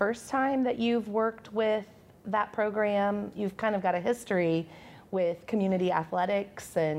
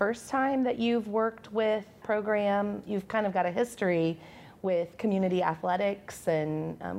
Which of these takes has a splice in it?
second; 1 cut; at 2.0 s

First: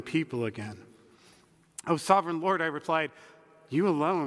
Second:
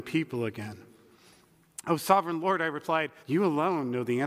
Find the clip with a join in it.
second; 1 cut; at 3.2 s

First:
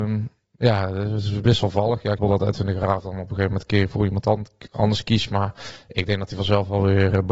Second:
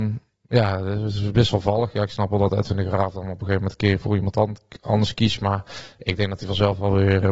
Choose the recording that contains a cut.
first; 1 cut; at 2.2 s

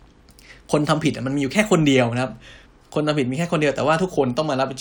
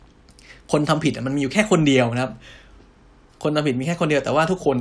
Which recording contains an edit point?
first; 1 cut; at 2.7 s

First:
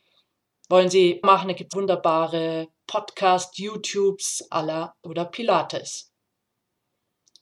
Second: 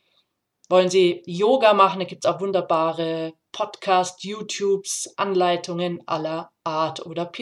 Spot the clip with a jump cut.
first; 4 cuts; at 1.2 s, 1.7 s, 4.5 s, 5.0 s

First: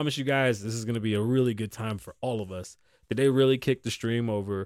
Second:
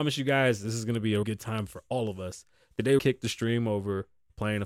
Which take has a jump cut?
second; 2 cuts; at 1.2 s, 3.0 s

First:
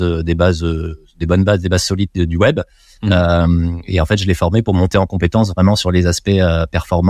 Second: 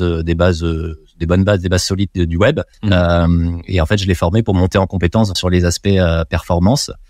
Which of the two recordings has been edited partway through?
second; 2 cuts; at 2.7 s, 5.4 s

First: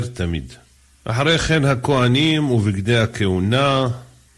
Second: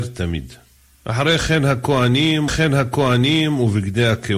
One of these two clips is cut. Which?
second; 1 cut; at 2.5 s

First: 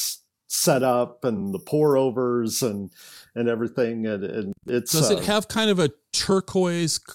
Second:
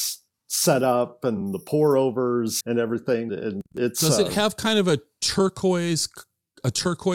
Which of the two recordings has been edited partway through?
second; 2 cuts; at 2.6 s, 3.3 s

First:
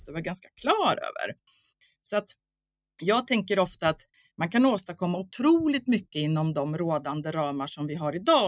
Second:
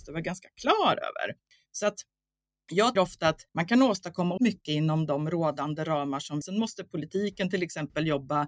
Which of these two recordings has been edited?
second; 5 cuts; at 1.5 s, 3.0 s, 3.5 s, 4.4 s, 6.4 s

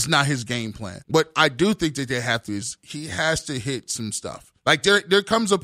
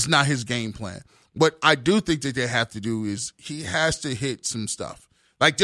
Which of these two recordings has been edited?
first; 3 cuts; at 1.0 s, 2.5 s, 4.6 s

